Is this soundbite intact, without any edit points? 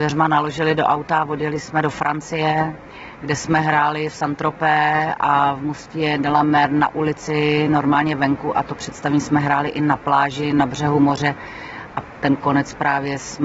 yes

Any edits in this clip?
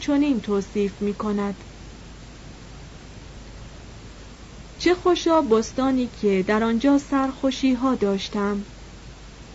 no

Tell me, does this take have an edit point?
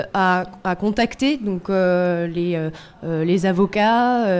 no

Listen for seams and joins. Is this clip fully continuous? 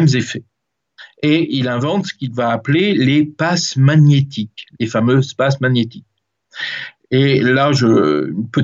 yes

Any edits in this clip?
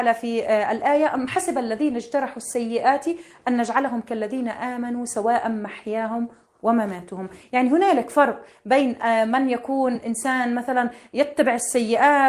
no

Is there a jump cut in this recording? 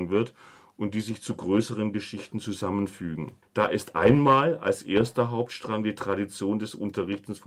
yes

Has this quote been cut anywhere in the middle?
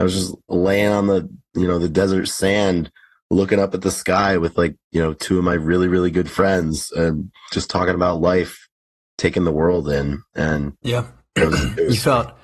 no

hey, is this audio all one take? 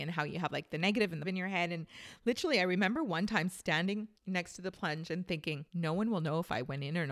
no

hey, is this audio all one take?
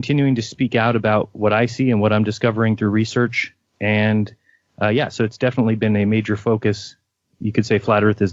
yes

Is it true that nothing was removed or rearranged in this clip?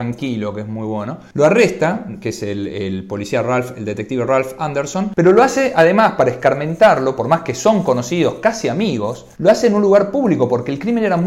no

